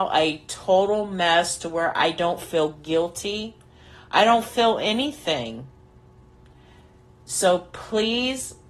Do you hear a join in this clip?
no; 0 cuts

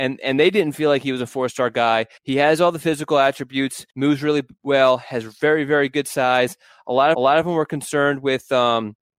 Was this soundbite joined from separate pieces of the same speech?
yes; 3 cuts; at 2.2 s, 3.9 s, 7.1 s

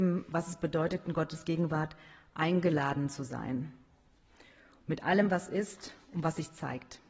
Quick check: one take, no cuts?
yes; 0 cuts

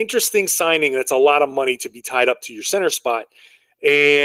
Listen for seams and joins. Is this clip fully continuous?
yes; 0 cuts

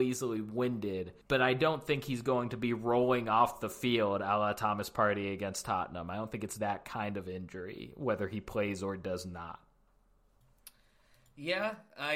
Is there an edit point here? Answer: yes; 1 cut; at 1.2 s

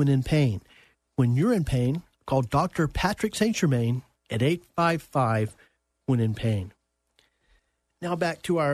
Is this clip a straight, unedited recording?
yes; 0 cuts

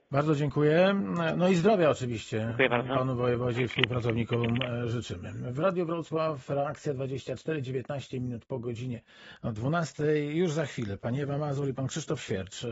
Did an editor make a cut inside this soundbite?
no; 0 cuts

